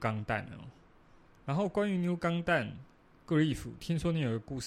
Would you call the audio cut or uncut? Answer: uncut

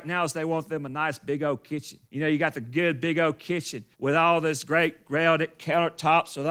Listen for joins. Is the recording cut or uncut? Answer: cut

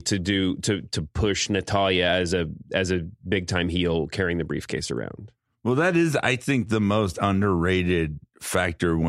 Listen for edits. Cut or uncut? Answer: uncut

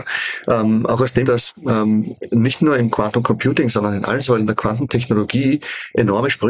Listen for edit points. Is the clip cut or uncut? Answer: cut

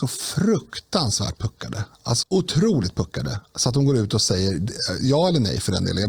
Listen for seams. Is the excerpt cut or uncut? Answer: cut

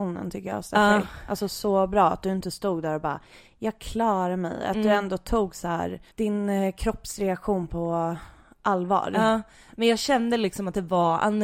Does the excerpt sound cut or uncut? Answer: cut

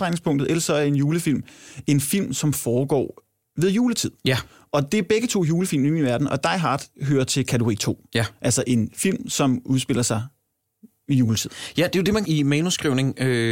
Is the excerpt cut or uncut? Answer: cut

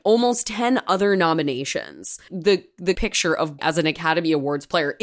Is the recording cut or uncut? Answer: cut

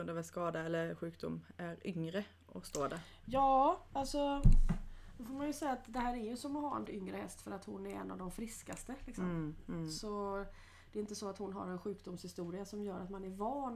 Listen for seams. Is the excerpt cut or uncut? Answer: cut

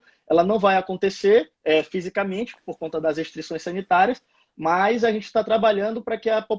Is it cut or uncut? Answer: cut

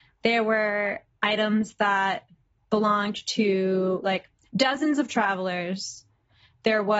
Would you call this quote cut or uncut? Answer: uncut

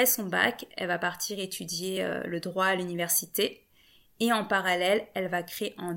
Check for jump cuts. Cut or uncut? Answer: uncut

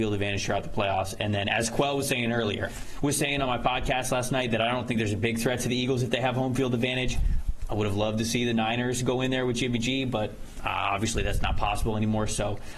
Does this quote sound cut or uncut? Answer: cut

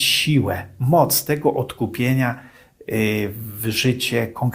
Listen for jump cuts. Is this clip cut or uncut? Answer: uncut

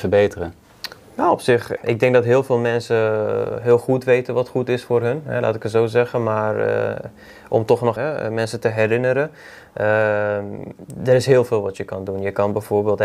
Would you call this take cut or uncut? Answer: cut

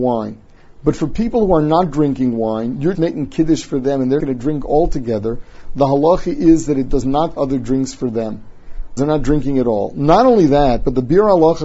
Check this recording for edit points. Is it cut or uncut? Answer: cut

